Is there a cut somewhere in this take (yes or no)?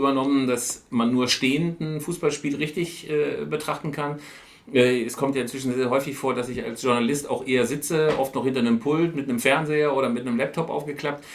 no